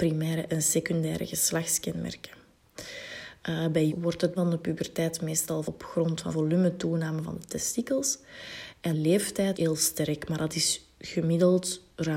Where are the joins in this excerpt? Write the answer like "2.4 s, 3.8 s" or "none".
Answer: 3.9 s, 4.4 s, 5.6 s, 6.3 s, 8.9 s, 9.5 s